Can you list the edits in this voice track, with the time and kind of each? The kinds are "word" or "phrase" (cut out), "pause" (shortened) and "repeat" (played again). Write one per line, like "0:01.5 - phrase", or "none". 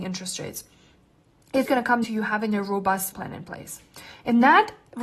0:01.7 - word
0:02.0 - word
0:03.1 - word